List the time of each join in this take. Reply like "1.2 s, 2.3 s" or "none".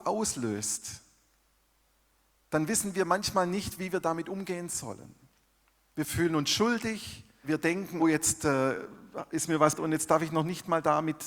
7.4 s, 8.0 s, 9.8 s